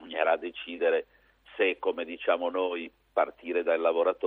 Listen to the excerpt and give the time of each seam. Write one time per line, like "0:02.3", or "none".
none